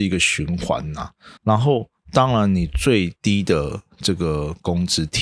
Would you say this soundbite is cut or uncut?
cut